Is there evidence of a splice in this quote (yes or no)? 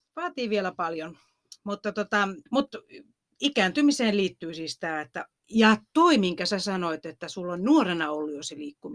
yes